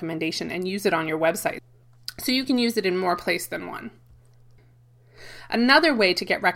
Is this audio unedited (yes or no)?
yes